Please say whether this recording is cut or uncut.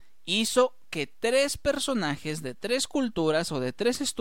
uncut